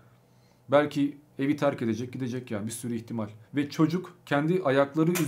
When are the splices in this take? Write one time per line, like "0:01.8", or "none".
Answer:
0:03.4